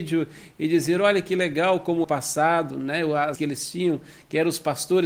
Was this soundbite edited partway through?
yes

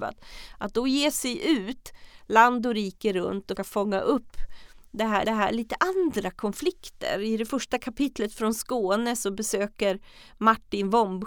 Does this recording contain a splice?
yes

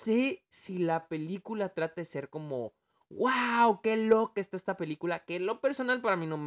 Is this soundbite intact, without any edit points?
yes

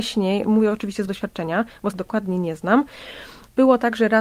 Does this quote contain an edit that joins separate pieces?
yes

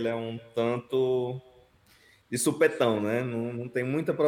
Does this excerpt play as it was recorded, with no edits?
yes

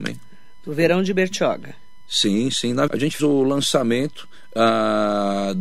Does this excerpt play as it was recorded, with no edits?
no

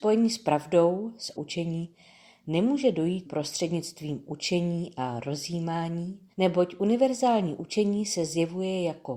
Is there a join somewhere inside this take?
yes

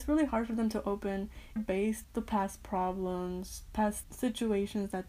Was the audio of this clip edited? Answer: yes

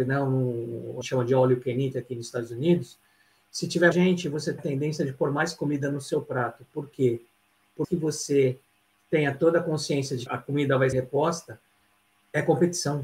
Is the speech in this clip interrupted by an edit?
yes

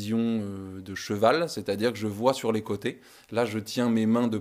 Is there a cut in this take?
no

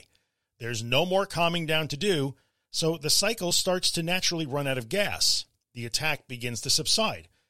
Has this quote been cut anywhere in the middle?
no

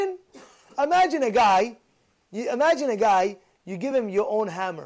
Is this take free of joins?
yes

